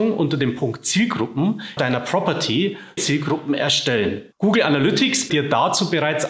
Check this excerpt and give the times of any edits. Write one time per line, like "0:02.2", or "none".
0:01.8
0:03.0
0:04.3
0:05.3